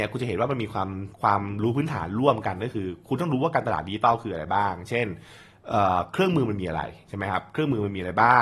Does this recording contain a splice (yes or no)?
yes